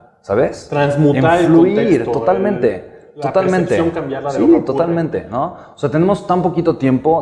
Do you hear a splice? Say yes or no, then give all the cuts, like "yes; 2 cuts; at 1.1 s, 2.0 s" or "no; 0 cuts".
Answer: no; 0 cuts